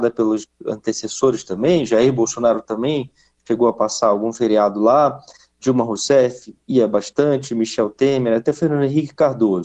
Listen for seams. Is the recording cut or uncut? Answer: uncut